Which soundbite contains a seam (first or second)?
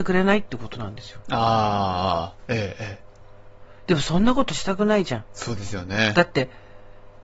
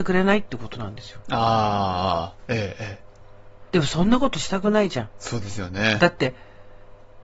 second